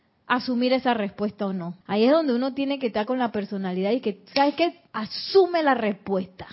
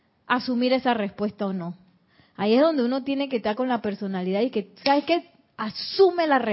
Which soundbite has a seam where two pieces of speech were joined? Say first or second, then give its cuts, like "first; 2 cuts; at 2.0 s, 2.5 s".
first; 2 cuts; at 1.8 s, 4.9 s